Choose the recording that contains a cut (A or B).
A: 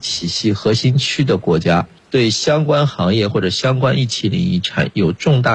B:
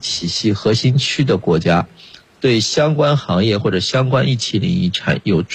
A